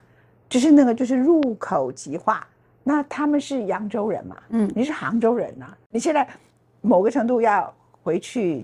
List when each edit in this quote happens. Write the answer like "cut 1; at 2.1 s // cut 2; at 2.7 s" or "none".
none